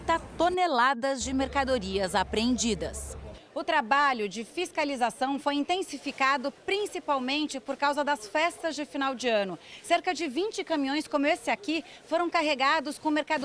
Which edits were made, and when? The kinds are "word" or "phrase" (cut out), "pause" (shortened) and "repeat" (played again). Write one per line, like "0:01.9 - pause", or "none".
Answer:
none